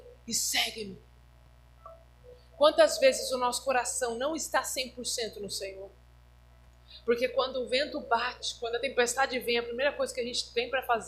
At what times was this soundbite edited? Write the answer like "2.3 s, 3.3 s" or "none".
none